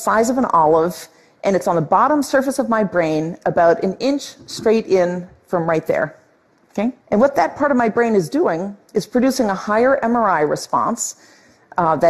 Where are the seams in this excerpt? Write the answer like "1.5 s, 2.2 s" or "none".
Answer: 7.0 s